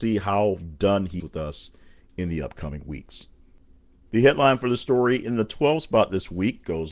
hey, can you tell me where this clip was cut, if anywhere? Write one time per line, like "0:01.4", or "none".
0:01.2